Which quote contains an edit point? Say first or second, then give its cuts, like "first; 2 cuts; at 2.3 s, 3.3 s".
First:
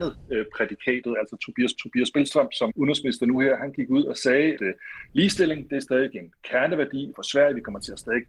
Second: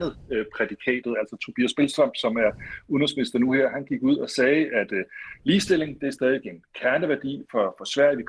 first; 4 cuts; at 1.7 s, 2.7 s, 4.6 s, 7.1 s